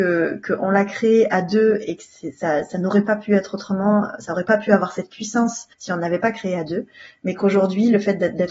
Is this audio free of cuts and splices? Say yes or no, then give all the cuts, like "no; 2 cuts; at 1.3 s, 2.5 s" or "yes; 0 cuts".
no; 1 cut; at 5.7 s